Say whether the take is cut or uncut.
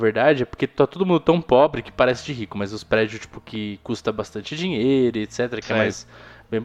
uncut